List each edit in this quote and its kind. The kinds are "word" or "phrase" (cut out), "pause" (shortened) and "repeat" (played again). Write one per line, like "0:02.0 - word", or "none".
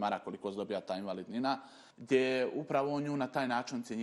0:01.9 - pause

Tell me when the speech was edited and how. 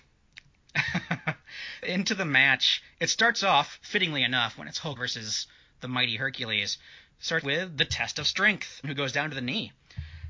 0:01.8 - word
0:05.0 - word
0:07.4 - word
0:08.8 - phrase

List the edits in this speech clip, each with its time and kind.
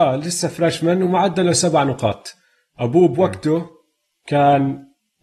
none

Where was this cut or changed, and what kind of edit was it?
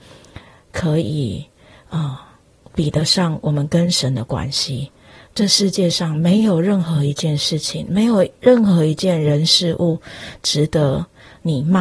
none

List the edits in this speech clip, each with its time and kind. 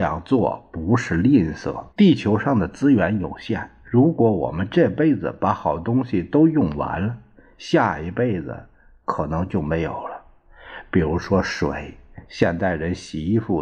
0:01.9 - pause

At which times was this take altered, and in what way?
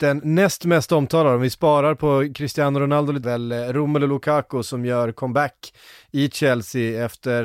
0:03.2 - phrase

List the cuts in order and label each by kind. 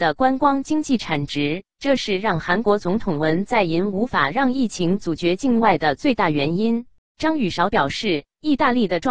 0:07.0 - pause

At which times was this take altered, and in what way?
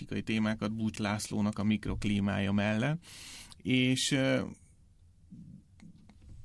0:01.0 - word

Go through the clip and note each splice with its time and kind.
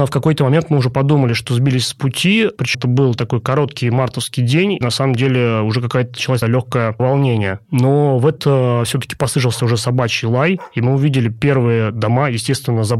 0:02.7 - word
0:04.8 - word
0:06.4 - word
0:08.4 - word

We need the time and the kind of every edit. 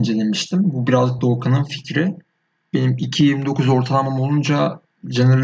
none

